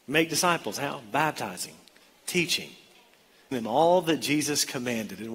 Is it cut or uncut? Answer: cut